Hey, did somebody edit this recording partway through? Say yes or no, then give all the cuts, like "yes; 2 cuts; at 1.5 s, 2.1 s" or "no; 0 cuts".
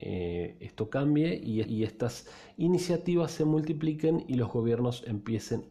yes; 1 cut; at 1.6 s